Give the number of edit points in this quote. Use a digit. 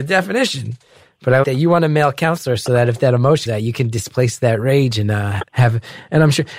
3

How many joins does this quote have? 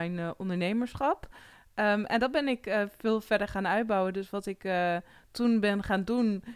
0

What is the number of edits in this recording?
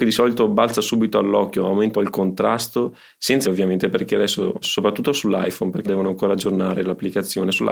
4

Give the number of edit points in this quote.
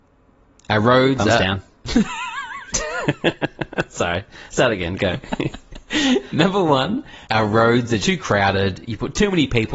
2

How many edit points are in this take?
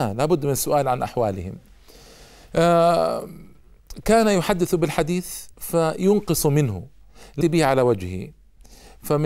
2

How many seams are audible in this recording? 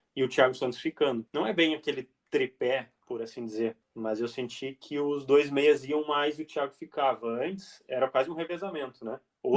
2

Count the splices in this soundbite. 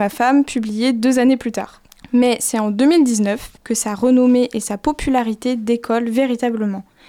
2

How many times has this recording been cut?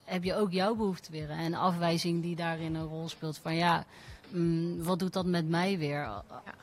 1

